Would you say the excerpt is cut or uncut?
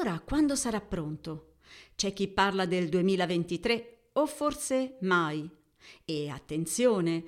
uncut